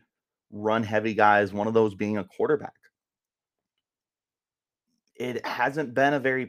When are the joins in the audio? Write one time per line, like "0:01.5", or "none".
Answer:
none